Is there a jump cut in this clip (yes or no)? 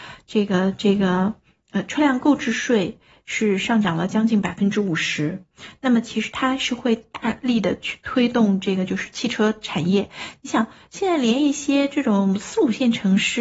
no